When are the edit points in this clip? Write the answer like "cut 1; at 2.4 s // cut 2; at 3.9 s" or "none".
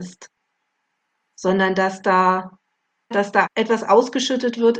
cut 1; at 3.1 s // cut 2; at 3.5 s